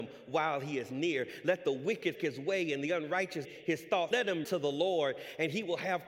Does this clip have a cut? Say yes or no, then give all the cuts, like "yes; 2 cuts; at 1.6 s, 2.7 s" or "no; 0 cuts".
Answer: yes; 4 cuts; at 2.1 s, 3.4 s, 4.1 s, 4.4 s